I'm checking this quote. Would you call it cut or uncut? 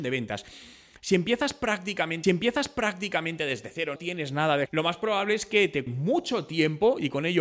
cut